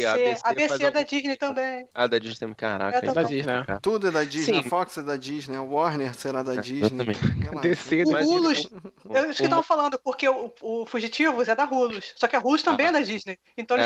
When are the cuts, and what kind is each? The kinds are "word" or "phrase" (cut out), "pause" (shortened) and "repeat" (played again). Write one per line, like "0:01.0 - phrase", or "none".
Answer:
0:01.9 - pause